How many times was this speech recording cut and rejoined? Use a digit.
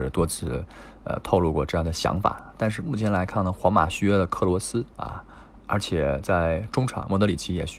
1